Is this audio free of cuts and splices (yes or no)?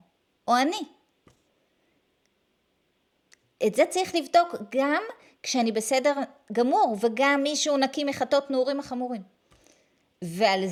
yes